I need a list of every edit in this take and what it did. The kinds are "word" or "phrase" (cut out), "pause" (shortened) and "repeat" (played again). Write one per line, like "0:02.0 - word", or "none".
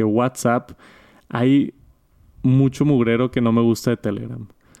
none